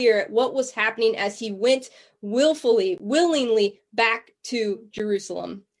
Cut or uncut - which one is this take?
uncut